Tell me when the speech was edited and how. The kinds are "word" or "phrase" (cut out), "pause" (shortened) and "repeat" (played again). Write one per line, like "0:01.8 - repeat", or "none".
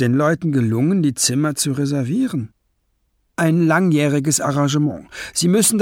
none